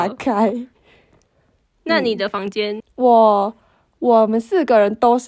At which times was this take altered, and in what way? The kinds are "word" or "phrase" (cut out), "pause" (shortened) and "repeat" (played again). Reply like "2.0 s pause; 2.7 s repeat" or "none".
2.8 s word